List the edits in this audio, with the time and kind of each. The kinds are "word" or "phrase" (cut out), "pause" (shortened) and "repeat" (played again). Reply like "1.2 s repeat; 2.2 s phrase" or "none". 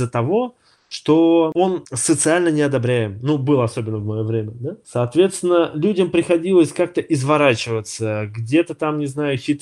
none